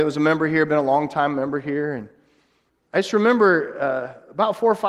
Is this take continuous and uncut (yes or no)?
yes